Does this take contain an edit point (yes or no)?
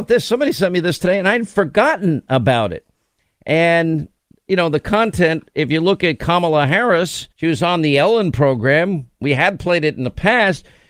yes